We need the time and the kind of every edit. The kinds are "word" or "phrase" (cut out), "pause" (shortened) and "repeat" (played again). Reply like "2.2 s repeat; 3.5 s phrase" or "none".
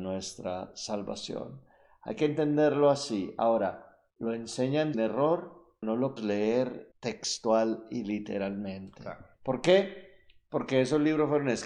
4.1 s pause; 4.9 s word; 5.8 s word; 6.2 s word; 6.9 s pause; 9.3 s pause